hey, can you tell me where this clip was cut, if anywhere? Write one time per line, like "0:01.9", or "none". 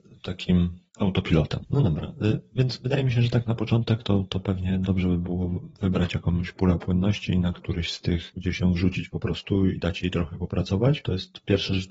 none